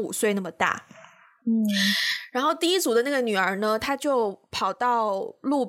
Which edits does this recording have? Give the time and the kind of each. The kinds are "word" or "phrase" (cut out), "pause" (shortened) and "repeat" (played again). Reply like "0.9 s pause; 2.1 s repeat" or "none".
none